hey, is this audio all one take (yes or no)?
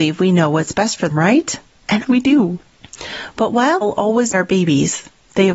no